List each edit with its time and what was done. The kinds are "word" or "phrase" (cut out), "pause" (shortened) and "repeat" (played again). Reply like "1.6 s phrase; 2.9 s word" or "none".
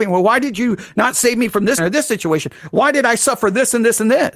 1.8 s word